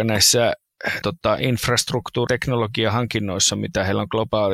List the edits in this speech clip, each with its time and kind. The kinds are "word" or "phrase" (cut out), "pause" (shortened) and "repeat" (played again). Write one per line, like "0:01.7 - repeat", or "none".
0:01.0 - word
0:02.3 - word